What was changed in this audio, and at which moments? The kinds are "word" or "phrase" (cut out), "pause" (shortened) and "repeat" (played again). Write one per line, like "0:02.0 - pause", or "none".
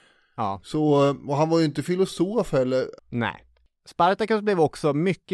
none